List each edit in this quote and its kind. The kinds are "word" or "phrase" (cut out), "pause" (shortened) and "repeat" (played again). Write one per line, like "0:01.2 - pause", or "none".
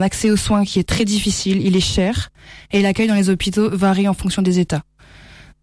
none